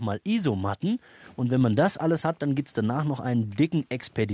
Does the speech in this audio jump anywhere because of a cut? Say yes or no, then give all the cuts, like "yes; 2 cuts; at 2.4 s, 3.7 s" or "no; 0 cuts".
no; 0 cuts